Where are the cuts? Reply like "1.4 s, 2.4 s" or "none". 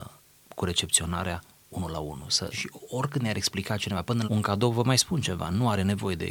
2.5 s, 4.3 s